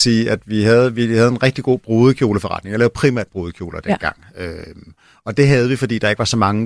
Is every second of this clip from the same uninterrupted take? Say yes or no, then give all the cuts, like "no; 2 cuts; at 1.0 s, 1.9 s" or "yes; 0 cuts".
yes; 0 cuts